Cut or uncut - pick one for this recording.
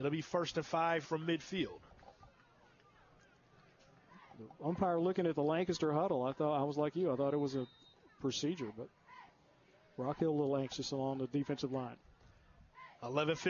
cut